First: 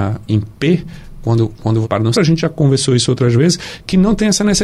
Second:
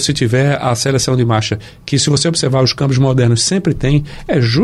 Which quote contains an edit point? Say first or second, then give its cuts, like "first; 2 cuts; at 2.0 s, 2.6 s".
first; 2 cuts; at 1.8 s, 2.1 s